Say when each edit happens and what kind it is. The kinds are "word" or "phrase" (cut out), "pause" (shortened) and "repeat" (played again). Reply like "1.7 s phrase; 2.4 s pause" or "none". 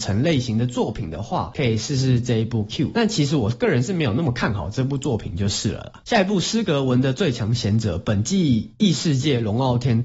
2.7 s phrase